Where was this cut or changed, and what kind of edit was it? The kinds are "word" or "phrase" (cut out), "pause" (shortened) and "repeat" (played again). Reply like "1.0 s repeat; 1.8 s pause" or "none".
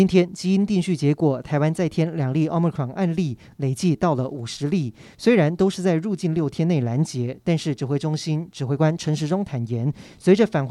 none

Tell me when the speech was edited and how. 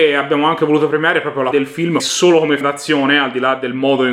1.5 s word; 2.0 s word; 2.6 s word

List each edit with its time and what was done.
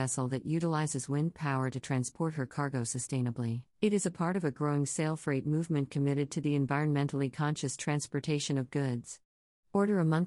3.7 s pause

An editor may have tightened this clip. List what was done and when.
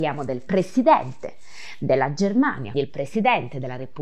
2.7 s word

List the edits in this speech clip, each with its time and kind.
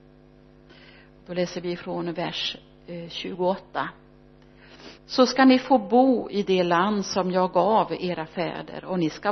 5.0 s pause

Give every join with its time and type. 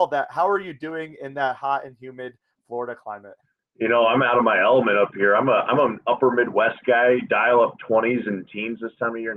none

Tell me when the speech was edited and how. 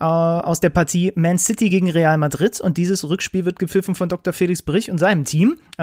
none

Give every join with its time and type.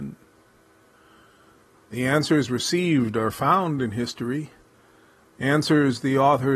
none

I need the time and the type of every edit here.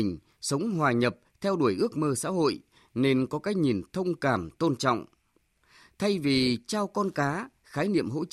none

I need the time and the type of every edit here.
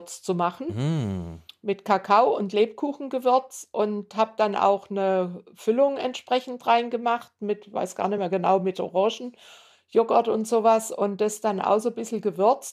none

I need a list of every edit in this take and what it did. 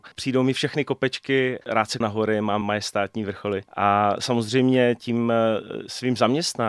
1.6 s word; 2.0 s word; 2.6 s word; 3.7 s pause

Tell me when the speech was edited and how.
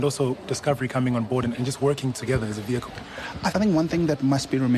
3.5 s word

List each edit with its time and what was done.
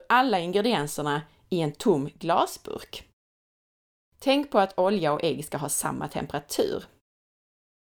none

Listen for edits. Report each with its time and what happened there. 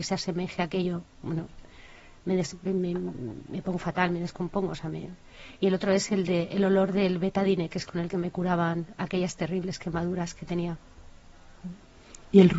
none

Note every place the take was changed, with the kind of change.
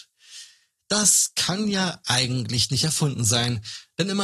none

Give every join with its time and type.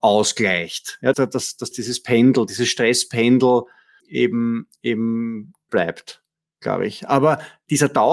1.1 s word; 1.7 s word; 4.0 s word; 5.7 s word

